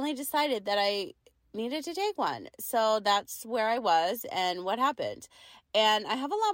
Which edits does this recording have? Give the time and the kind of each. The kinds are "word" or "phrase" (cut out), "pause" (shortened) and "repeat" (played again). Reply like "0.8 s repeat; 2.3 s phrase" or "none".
none